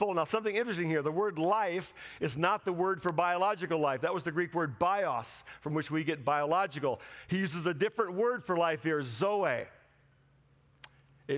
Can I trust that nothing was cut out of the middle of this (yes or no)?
yes